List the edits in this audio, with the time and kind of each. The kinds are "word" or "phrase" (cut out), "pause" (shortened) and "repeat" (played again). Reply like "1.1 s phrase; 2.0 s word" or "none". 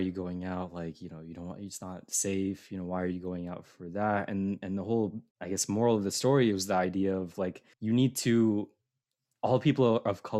5.3 s pause; 7.7 s pause